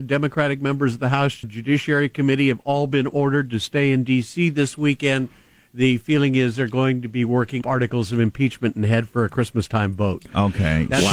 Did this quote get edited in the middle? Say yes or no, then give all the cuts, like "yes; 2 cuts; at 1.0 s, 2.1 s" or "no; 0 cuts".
yes; 2 cuts; at 1.4 s, 7.6 s